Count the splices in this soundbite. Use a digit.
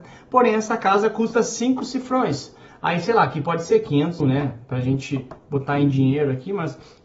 1